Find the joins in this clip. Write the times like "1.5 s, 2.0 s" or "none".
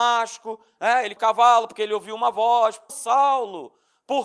1.2 s, 2.9 s